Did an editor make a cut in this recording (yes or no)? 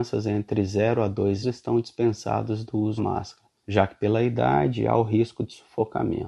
yes